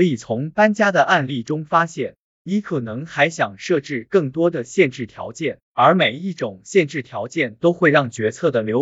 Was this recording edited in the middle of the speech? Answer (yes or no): yes